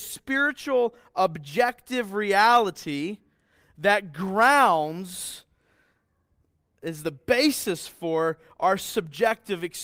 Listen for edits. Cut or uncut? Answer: uncut